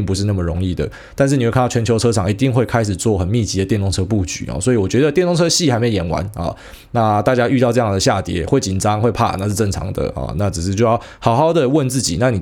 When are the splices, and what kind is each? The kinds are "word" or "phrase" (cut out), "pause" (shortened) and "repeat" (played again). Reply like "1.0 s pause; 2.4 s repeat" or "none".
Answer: none

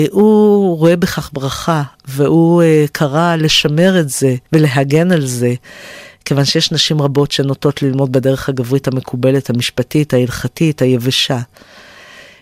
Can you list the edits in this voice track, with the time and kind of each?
4.5 s pause

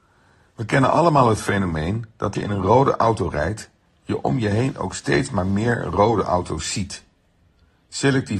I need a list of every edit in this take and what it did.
2.3 s word

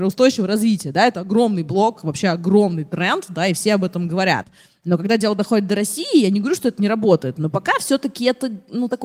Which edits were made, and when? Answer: none

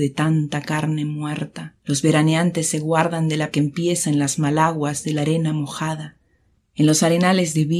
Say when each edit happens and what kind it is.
1.8 s pause; 3.5 s word

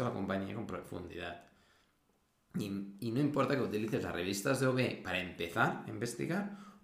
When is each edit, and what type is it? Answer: none

